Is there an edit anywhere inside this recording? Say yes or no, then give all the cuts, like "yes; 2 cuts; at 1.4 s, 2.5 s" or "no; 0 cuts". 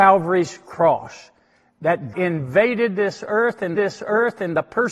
yes; 2 cuts; at 2.1 s, 3.7 s